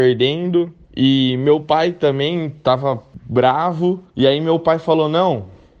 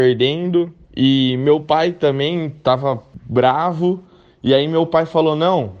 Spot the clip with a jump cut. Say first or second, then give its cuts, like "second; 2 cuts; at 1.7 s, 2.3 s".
first; 1 cut; at 4.1 s